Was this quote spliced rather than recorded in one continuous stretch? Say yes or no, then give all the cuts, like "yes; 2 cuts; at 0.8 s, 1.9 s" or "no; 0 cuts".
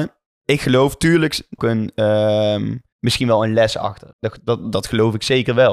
yes; 4 cuts; at 1.6 s, 2.9 s, 4.1 s, 4.6 s